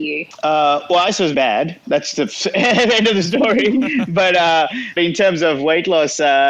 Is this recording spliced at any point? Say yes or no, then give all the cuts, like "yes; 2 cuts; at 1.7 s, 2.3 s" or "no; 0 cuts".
yes; 2 cuts; at 1.3 s, 5.0 s